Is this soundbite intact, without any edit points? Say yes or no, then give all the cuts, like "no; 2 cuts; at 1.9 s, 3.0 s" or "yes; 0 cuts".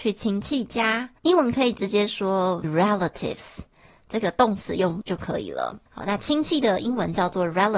no; 4 cuts; at 1.2 s, 2.6 s, 5.0 s, 5.9 s